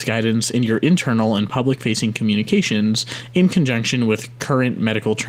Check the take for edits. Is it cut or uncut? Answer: uncut